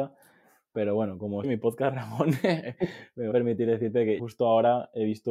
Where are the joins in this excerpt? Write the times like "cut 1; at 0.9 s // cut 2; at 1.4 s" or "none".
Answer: cut 1; at 1.4 s // cut 2; at 3.3 s // cut 3; at 4.2 s

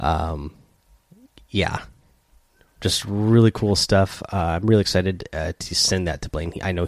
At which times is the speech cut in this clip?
none

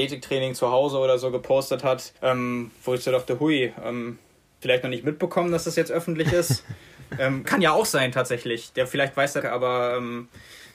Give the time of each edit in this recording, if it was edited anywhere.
cut 1; at 2.2 s // cut 2; at 4.6 s // cut 3; at 7.4 s // cut 4; at 9.4 s

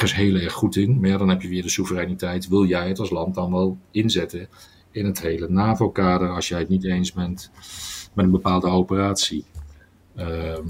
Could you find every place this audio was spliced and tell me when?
none

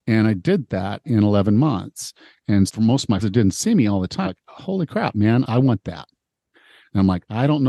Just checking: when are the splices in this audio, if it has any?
cut 1; at 2.7 s // cut 2; at 3.2 s // cut 3; at 4.2 s

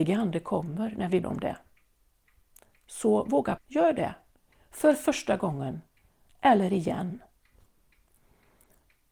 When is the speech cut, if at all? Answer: cut 1; at 1.2 s // cut 2; at 3.6 s

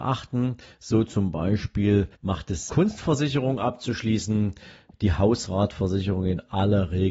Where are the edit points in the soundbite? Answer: cut 1; at 2.1 s // cut 2; at 2.7 s // cut 3; at 4.9 s

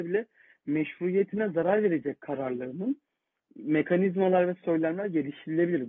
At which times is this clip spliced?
cut 1; at 3.4 s

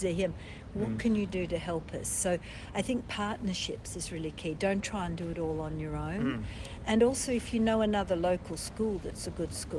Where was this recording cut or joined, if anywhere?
none

